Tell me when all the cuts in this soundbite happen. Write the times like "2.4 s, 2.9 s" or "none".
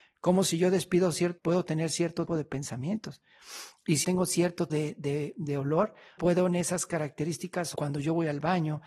1.4 s, 2.3 s, 4.0 s, 4.7 s, 6.2 s, 7.7 s